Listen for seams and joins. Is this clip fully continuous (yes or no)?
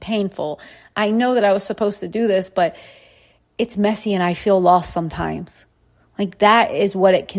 yes